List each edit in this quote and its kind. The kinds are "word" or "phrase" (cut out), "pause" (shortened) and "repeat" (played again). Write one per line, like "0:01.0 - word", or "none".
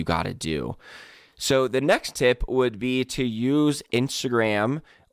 none